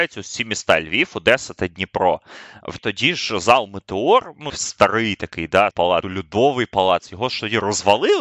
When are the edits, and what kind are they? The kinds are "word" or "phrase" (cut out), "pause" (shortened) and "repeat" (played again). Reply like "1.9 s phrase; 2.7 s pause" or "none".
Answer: 2.8 s word; 4.5 s word; 5.7 s phrase; 6.0 s word